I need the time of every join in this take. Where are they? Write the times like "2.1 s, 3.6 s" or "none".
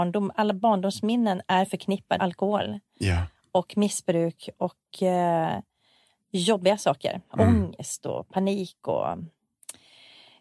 2.2 s